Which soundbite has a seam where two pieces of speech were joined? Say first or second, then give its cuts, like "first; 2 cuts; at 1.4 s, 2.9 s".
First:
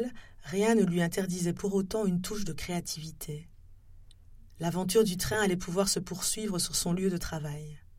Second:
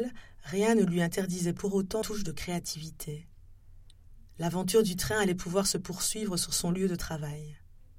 second; 1 cut; at 2.0 s